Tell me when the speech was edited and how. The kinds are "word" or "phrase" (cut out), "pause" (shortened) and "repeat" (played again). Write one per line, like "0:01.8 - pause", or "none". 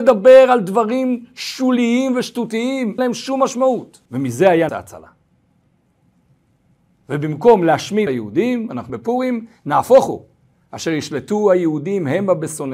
0:03.0 - word
0:04.1 - pause
0:04.7 - word
0:08.1 - phrase
0:08.9 - word